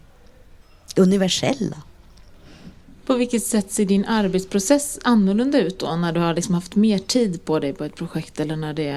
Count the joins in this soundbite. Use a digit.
0